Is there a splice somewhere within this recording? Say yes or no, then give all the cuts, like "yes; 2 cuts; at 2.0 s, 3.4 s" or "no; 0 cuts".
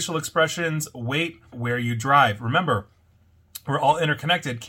yes; 1 cut; at 1.5 s